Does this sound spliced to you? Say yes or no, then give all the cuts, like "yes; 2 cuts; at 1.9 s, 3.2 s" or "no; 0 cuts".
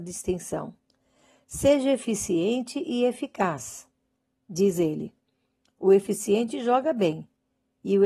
no; 0 cuts